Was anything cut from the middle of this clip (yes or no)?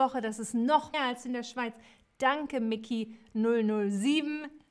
yes